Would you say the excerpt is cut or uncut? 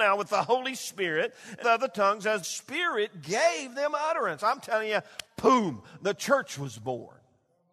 cut